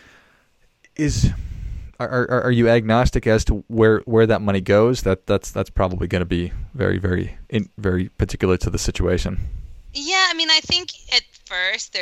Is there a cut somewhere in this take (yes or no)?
no